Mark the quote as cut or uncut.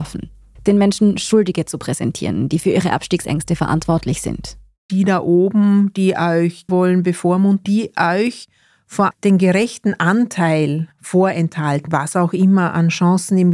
cut